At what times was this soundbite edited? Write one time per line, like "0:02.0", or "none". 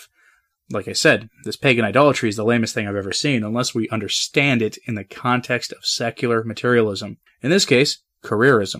0:07.3